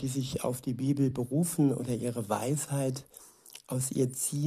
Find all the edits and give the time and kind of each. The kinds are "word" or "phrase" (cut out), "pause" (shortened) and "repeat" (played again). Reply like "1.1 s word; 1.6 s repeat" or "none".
none